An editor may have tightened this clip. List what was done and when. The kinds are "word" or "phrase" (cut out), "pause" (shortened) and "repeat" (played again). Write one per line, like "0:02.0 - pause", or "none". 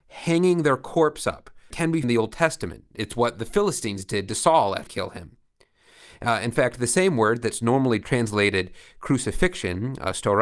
0:01.7 - word
0:02.0 - word
0:04.9 - word